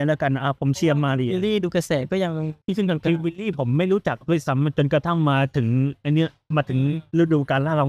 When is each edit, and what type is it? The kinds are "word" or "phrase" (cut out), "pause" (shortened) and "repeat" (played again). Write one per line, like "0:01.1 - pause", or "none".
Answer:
0:02.6 - pause